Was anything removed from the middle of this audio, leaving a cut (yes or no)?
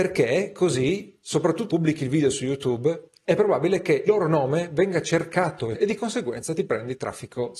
yes